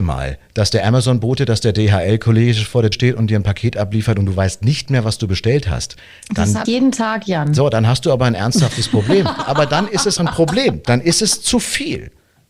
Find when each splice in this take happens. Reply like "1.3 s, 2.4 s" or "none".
2.9 s, 6.6 s, 9.4 s, 10.2 s